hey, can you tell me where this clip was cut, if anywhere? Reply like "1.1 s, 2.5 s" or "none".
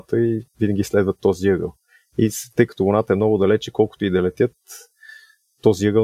none